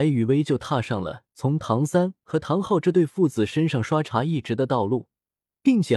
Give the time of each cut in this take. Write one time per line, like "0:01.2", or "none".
none